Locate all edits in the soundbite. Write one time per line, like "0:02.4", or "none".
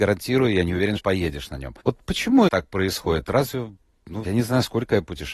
0:01.0
0:01.8
0:02.5
0:04.2